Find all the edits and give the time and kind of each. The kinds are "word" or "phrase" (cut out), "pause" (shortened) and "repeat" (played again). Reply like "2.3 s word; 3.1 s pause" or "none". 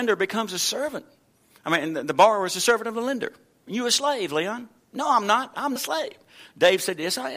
5.8 s word

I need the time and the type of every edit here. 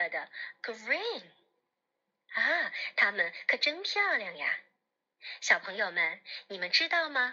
none

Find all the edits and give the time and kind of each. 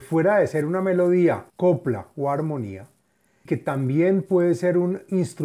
1.5 s pause; 3.5 s word

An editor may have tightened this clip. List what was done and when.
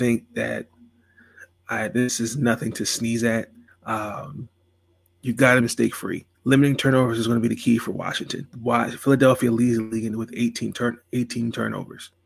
3.7 s pause; 5.6 s word; 6.3 s pause; 8.5 s pause

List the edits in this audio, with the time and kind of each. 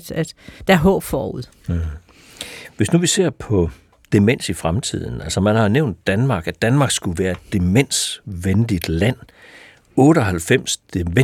none

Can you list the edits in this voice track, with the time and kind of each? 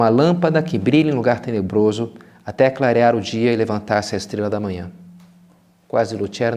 none

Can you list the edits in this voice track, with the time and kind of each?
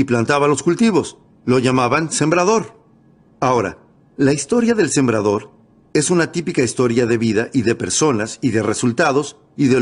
none

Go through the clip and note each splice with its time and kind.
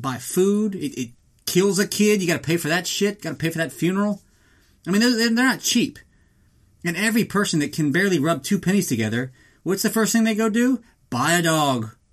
none

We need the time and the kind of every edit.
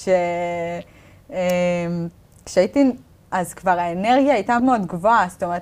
3.3 s word; 4.6 s word

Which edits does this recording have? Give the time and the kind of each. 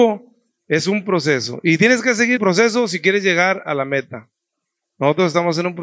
2.4 s word

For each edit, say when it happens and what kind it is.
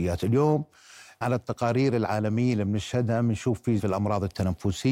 1.2 s word; 3.8 s word

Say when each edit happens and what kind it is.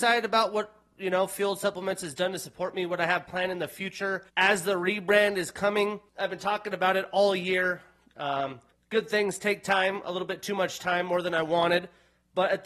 4.3 s pause; 6.1 s pause; 8.7 s pause

